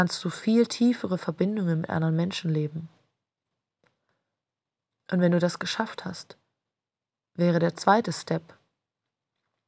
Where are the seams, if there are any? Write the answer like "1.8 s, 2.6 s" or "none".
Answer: none